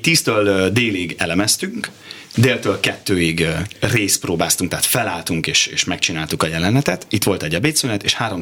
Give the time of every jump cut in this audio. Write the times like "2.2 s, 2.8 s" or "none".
none